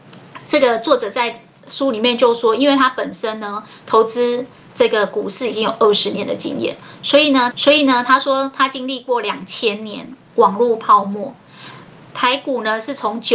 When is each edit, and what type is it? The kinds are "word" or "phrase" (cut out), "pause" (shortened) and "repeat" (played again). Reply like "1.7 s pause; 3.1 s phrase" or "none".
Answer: 7.5 s repeat